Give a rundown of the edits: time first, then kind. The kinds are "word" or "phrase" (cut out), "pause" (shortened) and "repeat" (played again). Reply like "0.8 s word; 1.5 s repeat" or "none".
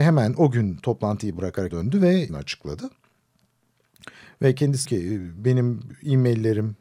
1.7 s word; 2.3 s word; 4.8 s word